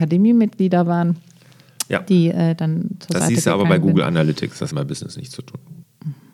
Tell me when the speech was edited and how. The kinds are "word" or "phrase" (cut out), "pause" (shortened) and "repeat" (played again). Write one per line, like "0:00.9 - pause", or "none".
0:04.7 - phrase

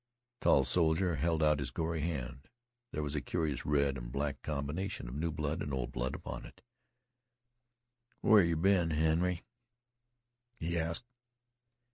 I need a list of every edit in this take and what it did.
none

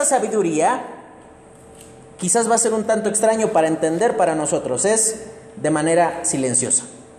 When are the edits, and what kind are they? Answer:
none

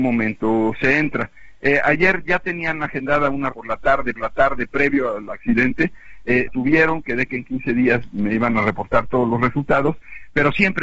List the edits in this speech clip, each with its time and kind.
0:03.5 - word
0:04.2 - repeat
0:06.5 - word

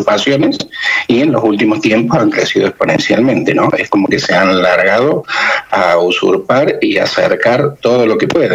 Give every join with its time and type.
none

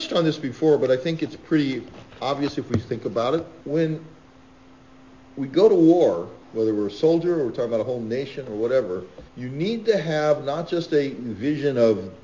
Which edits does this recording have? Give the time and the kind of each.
0:03.6 - pause
0:06.4 - pause
0:09.3 - pause

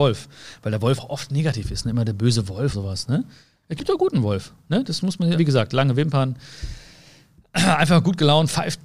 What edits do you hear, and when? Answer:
0:01.0 - word
0:02.7 - word
0:05.3 - word

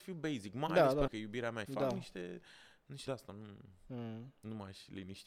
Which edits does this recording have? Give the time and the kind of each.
0:01.1 - word
0:01.7 - phrase
0:03.1 - word

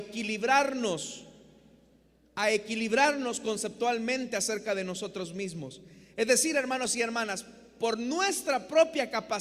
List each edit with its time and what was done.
none

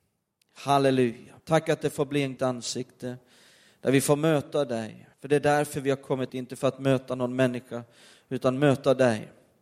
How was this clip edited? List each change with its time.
0:01.4 - pause
0:02.4 - phrase
0:05.1 - pause
0:06.3 - word

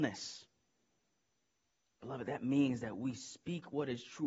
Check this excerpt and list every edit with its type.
none

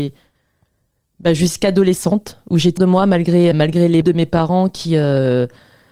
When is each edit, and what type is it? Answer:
0:02.8 - word
0:03.5 - word
0:04.0 - word

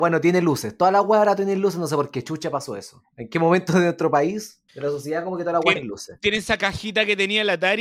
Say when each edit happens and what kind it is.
0:04.7 - pause
0:05.8 - word

